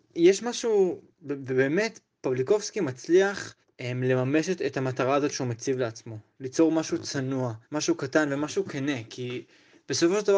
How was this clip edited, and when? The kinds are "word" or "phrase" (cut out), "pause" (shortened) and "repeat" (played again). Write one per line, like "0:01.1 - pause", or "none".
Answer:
0:03.6 - pause
0:07.6 - pause